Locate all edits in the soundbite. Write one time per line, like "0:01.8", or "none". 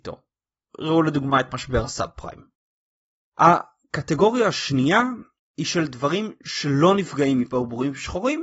none